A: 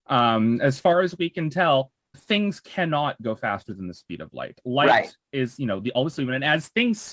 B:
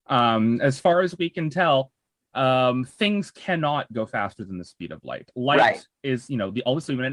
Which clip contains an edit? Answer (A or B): A